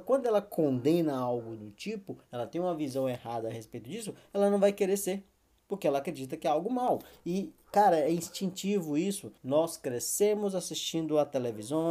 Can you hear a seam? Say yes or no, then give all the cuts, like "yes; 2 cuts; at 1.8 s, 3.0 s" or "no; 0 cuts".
yes; 1 cut; at 9.4 s